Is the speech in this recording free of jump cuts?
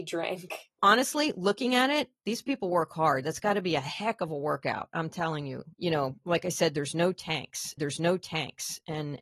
no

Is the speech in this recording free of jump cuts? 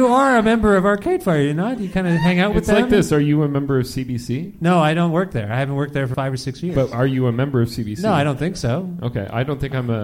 no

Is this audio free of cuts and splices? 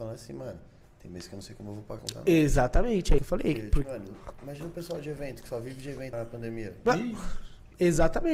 no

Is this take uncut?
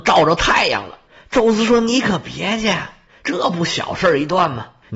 yes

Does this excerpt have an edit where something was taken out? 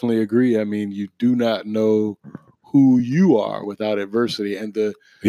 no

